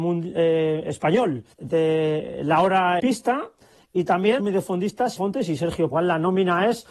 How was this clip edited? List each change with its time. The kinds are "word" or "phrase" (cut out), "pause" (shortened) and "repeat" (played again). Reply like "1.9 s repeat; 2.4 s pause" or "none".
1.5 s pause; 3.0 s word; 4.4 s word; 5.2 s word; 5.9 s phrase

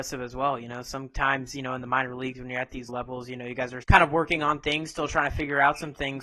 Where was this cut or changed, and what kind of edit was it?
2.9 s word; 3.8 s word

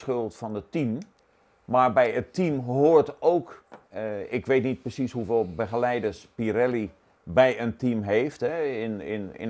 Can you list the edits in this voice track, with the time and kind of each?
3.8 s pause

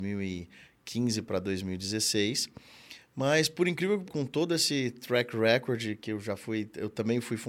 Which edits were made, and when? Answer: 4.0 s word

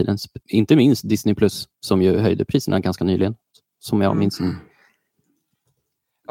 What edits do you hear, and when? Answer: none

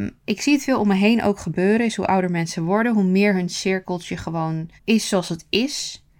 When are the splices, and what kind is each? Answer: 4.8 s pause

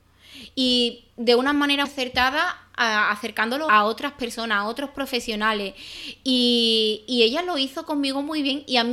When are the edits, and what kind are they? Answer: 1.8 s word; 3.7 s word

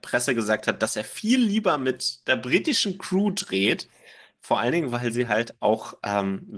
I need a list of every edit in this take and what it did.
none

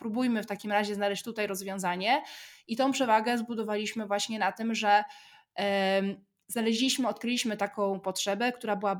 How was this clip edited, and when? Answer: none

